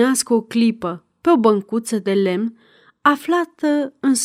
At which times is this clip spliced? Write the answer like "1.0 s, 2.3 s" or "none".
none